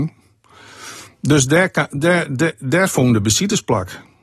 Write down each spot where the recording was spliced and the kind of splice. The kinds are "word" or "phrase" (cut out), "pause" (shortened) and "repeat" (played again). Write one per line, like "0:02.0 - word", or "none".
none